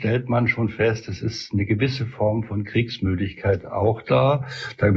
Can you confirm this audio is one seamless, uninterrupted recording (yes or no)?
yes